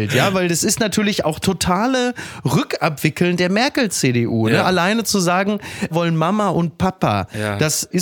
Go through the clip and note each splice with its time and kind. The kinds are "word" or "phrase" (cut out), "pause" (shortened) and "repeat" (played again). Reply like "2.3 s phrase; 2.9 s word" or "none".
1.4 s word; 5.9 s word